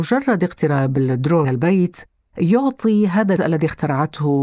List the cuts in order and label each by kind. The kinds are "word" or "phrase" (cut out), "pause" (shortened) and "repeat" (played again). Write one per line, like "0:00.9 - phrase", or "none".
0:01.4 - word
0:03.4 - word

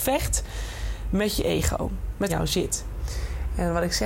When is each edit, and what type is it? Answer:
0:02.3 - phrase

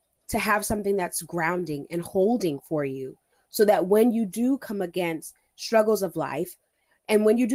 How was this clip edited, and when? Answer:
none

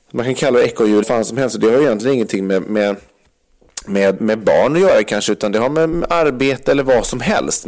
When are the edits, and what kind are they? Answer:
0:01.0 - phrase
0:04.2 - word
0:05.9 - word

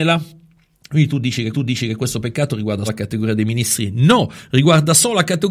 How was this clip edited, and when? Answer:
0:01.5 - repeat
0:02.9 - word

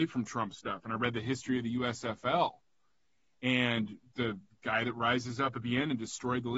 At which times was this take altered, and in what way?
none

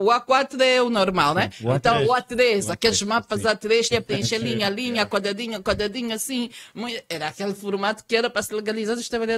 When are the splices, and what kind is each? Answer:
0:03.9 - phrase

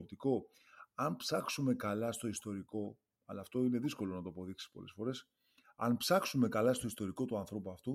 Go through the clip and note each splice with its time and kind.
none

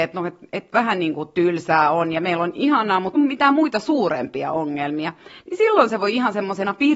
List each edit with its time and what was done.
0:03.2 - word

